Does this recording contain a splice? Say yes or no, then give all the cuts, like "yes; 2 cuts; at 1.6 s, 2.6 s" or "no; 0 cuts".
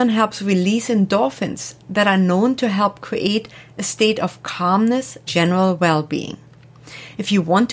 yes; 1 cut; at 5.3 s